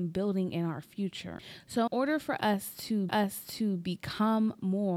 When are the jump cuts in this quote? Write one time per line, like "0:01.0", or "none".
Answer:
0:01.9
0:03.1